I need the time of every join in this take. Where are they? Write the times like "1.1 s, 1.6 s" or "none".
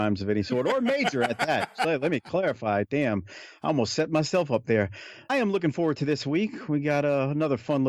5.3 s